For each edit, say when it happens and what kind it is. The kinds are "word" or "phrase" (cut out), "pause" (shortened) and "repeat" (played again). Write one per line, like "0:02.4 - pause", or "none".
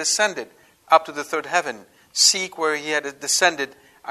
none